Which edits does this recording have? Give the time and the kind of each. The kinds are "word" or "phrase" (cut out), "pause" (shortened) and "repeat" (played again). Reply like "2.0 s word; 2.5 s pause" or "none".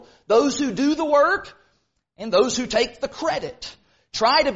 none